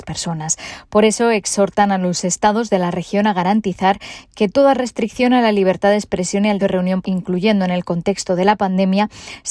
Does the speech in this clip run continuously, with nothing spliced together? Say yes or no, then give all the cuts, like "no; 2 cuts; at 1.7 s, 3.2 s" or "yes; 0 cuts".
no; 2 cuts; at 6.6 s, 7.0 s